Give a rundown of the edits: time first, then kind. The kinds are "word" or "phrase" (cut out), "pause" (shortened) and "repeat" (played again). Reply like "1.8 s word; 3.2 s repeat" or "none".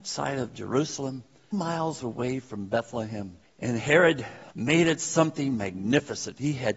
1.5 s word; 3.4 s pause; 4.5 s phrase

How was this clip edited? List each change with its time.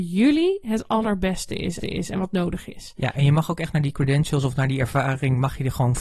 1.8 s repeat

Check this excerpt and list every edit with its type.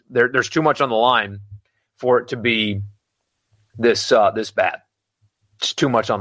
none

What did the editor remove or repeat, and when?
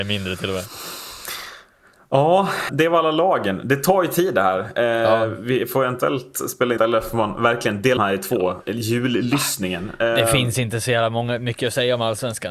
2.7 s word; 6.8 s phrase; 8.0 s phrase

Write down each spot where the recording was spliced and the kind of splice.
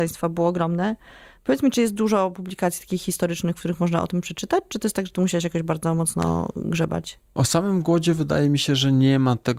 none

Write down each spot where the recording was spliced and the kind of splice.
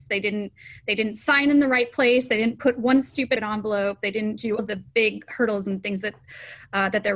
3.4 s phrase; 4.6 s word; 4.9 s pause

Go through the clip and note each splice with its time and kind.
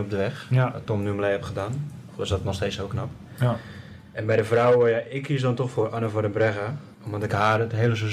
6.9 s pause

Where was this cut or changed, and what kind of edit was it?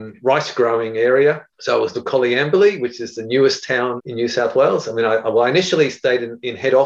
1.5 s pause; 1.9 s phrase; 4.0 s word

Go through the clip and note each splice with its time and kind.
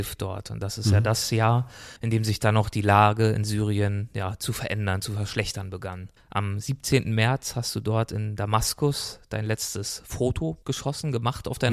2.0 s pause; 6.2 s pause; 10.6 s pause

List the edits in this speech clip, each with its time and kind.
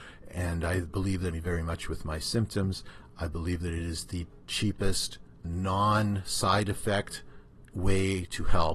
1.3 s phrase; 4.4 s word; 5.4 s word

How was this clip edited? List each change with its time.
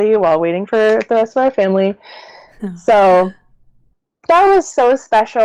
none

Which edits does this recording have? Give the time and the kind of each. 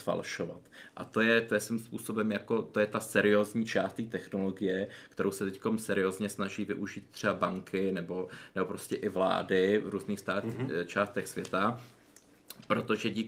none

